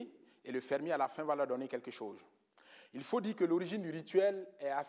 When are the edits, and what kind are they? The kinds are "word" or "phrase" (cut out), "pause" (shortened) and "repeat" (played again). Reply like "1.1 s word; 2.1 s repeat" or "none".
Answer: none